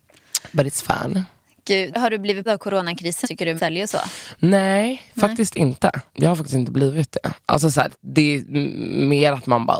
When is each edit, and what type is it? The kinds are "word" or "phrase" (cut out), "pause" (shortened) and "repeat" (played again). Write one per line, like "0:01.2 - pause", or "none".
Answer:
0:01.9 - word
0:02.5 - word
0:03.2 - word
0:03.6 - word
0:06.1 - pause